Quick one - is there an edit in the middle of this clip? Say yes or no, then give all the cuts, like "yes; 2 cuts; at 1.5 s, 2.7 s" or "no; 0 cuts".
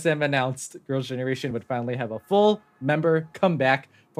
no; 0 cuts